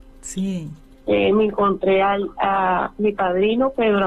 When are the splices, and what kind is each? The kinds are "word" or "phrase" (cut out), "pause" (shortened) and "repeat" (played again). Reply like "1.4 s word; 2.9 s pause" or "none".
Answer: 0.9 s pause